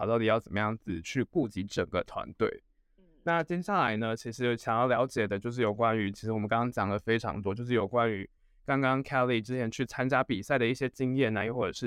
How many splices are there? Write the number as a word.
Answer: zero